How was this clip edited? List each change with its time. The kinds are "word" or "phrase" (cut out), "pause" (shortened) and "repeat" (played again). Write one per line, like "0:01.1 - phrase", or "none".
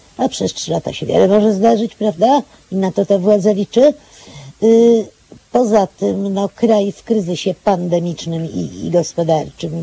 none

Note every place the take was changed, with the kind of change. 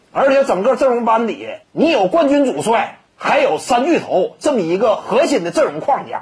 0:01.6 - pause
0:03.1 - pause

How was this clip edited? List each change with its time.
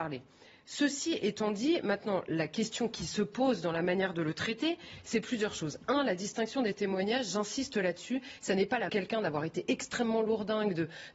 0:08.9 - phrase

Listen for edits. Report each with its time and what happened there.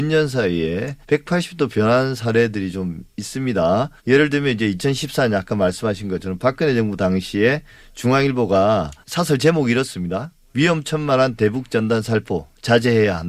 0:01.0 - pause
0:04.0 - pause
0:09.0 - pause

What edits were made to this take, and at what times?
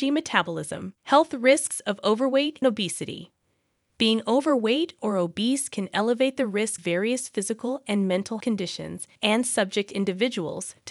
0:01.0 - pause
0:02.6 - word
0:06.8 - word
0:08.4 - word
0:09.2 - pause

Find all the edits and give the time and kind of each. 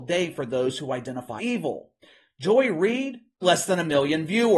0:01.4 - word
0:03.4 - word

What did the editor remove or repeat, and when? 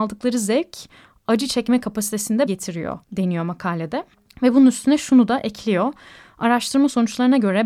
0:02.5 - word
0:03.0 - pause
0:04.1 - pause

